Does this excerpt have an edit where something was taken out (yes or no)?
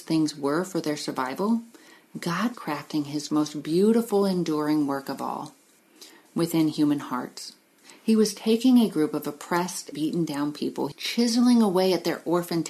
yes